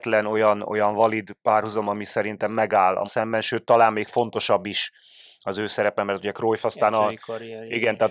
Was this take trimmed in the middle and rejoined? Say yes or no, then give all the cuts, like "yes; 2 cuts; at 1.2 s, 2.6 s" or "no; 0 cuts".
yes; 1 cut; at 3.1 s